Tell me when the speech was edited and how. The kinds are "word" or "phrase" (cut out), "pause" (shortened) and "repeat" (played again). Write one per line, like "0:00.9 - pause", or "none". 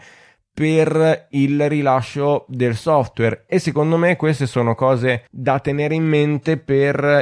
0:05.3 - pause